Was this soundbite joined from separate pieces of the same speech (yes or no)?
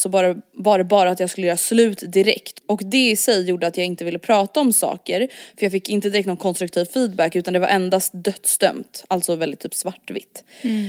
no